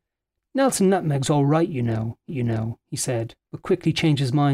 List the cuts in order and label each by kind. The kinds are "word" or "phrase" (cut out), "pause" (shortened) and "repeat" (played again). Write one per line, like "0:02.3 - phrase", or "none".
0:02.3 - repeat